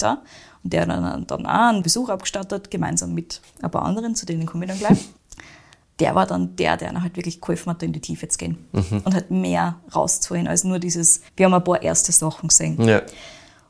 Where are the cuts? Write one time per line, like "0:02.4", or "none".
0:05.2
0:11.3